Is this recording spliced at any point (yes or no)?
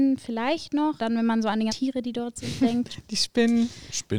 yes